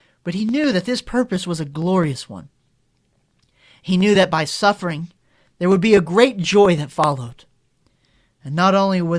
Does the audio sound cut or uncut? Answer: uncut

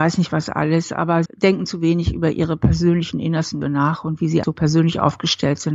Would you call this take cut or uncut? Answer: cut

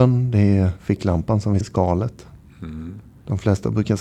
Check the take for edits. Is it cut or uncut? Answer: cut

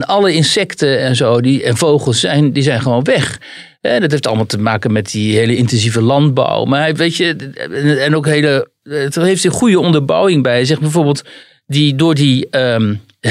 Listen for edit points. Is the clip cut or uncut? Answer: uncut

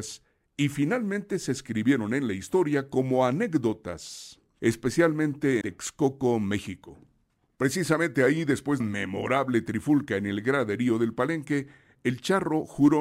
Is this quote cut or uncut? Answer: cut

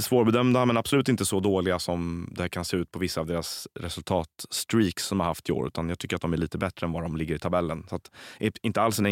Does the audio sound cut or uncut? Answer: uncut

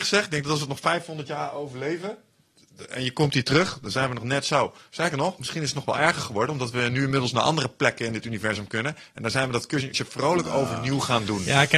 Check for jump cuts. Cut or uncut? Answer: cut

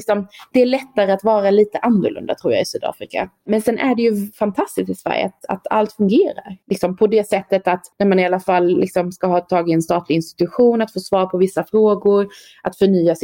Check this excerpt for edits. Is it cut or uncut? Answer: cut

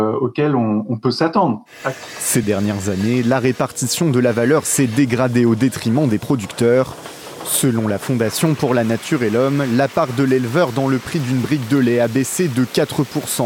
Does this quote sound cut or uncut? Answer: uncut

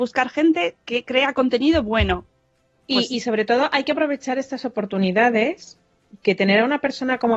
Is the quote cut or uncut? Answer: uncut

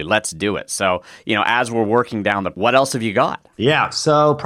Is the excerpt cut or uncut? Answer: cut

